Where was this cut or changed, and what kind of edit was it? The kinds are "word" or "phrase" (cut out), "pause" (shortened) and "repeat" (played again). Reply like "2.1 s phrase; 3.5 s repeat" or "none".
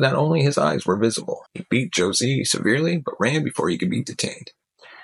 1.5 s pause